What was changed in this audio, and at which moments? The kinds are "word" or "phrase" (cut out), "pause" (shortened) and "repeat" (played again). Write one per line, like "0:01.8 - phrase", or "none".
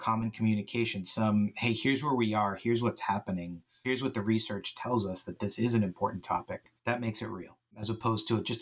0:06.8 - pause
0:07.6 - pause